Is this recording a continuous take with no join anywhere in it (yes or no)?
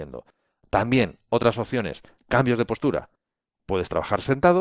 yes